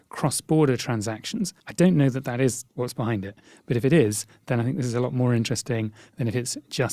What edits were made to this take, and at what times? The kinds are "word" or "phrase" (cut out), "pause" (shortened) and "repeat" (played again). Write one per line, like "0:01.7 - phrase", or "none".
0:01.6 - pause
0:02.7 - pause

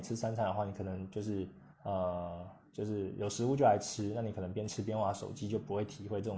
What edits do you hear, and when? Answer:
0:01.7 - pause

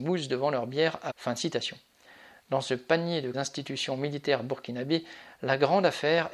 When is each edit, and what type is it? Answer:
0:01.1 - word
0:03.3 - phrase

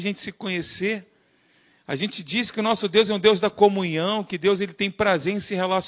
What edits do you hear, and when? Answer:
none

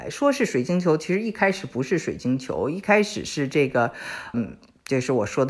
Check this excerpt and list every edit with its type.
0:04.3 - word

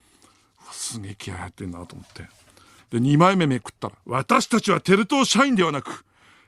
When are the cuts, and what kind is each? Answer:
0:04.0 - pause

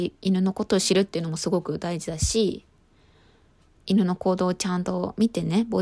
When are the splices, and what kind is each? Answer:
0:03.8 - word

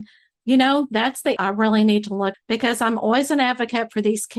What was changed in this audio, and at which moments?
0:01.4 - word
0:02.3 - word

